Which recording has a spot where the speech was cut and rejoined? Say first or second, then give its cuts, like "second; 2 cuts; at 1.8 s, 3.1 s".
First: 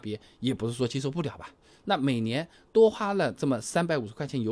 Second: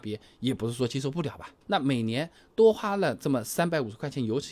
second; 1 cut; at 1.6 s